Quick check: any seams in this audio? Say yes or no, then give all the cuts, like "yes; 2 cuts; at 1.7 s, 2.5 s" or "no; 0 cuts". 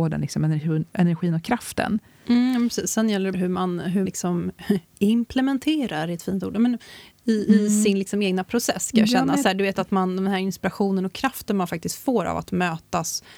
yes; 2 cuts; at 3.3 s, 4.1 s